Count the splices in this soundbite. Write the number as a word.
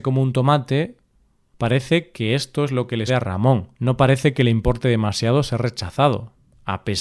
two